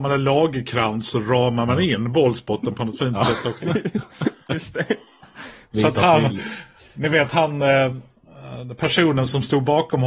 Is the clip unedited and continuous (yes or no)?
yes